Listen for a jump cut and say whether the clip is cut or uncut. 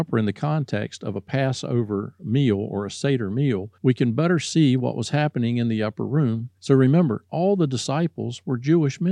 cut